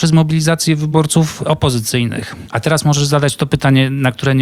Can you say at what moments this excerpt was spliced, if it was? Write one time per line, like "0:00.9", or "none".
none